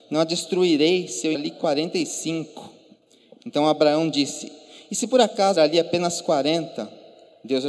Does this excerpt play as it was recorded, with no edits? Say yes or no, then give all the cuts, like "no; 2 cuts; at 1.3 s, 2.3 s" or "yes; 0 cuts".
no; 2 cuts; at 1.3 s, 5.6 s